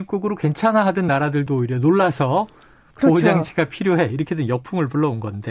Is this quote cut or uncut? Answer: uncut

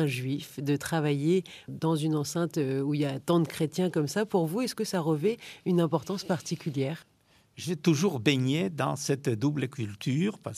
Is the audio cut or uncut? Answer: uncut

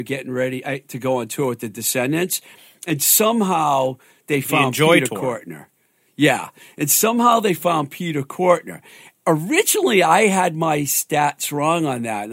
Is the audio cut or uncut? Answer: uncut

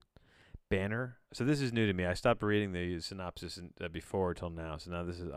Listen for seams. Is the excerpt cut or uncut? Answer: cut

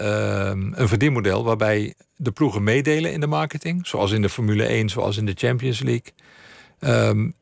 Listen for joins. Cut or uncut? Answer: uncut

